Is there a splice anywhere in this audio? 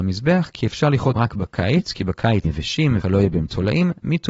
yes; 3 cuts; at 1.2 s, 2.4 s, 3.0 s

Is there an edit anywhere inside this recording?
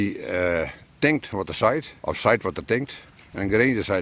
yes; 1 cut; at 2.0 s

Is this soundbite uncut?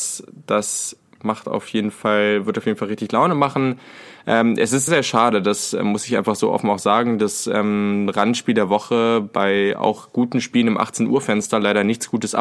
no; 1 cut; at 4.9 s

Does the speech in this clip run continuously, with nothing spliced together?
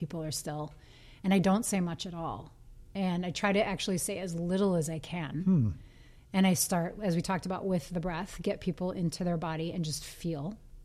yes; 0 cuts

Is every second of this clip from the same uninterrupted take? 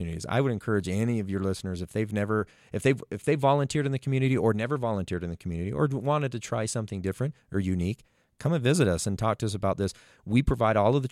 yes; 0 cuts

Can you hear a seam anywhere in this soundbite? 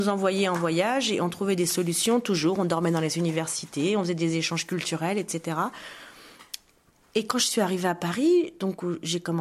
no; 0 cuts

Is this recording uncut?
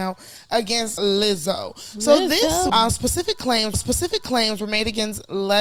no; 3 cuts; at 1.0 s, 2.7 s, 3.7 s

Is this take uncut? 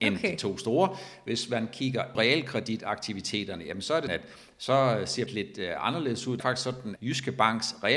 no; 5 cuts; at 2.1 s, 4.1 s, 5.3 s, 6.4 s, 7.0 s

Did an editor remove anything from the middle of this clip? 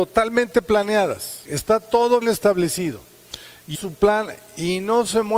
yes; 3 cuts; at 1.4 s, 2.2 s, 3.7 s

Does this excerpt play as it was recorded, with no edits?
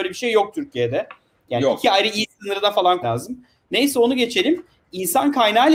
no; 1 cut; at 3.0 s

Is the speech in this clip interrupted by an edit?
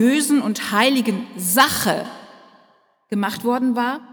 no; 0 cuts

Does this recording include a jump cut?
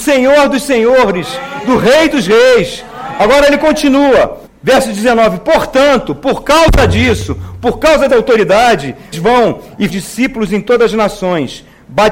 yes; 4 cuts; at 4.5 s, 8.1 s, 9.1 s, 9.9 s

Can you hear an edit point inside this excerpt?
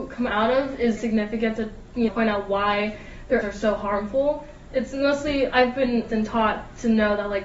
yes; 5 cuts; at 1.0 s, 2.1 s, 3.4 s, 5.5 s, 6.1 s

